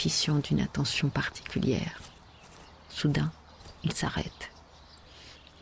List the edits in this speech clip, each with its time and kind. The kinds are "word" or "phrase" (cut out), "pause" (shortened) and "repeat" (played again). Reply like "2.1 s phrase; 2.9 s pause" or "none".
none